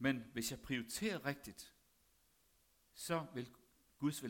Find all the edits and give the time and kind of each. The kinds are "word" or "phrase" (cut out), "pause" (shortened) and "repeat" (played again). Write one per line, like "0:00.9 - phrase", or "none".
none